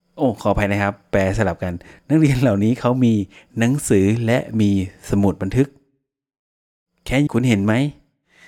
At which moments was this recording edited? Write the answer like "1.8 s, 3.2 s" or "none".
7.3 s